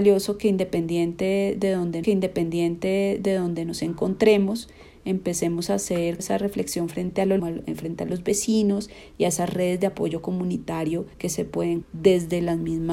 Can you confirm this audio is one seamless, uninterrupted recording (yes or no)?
no